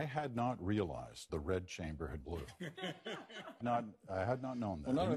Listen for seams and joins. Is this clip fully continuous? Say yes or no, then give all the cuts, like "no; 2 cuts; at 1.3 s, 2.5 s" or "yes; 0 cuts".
no; 3 cuts; at 1.3 s, 2.2 s, 3.6 s